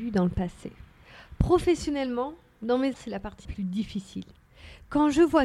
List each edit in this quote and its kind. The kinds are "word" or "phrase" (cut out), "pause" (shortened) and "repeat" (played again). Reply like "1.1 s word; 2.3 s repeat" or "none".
2.9 s word; 3.4 s word